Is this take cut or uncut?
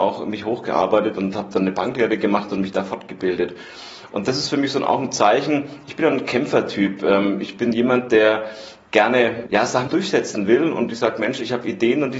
cut